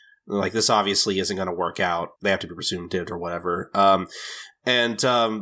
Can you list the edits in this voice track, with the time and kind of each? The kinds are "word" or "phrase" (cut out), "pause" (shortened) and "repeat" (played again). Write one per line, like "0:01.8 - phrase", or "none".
0:02.2 - pause